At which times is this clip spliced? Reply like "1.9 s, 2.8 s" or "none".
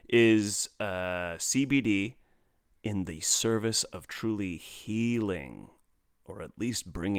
none